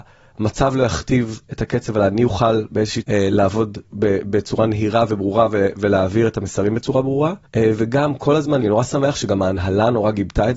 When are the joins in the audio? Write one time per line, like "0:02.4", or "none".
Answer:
0:01.5
0:03.0
0:03.9
0:07.5
0:08.6